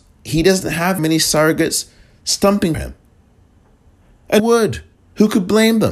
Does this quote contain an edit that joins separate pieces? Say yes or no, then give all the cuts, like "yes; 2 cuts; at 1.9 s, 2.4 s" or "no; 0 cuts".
yes; 4 cuts; at 1.0 s, 2.7 s, 4.4 s, 4.9 s